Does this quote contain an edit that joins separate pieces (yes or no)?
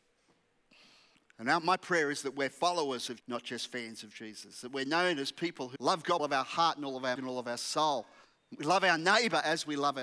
yes